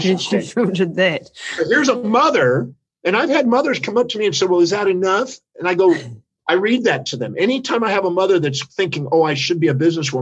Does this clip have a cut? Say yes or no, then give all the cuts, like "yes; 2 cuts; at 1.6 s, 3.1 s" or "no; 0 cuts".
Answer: no; 0 cuts